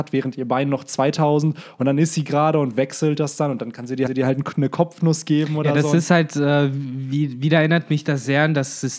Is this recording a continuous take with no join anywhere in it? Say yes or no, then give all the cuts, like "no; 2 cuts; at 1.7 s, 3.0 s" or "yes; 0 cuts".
no; 1 cut; at 4.1 s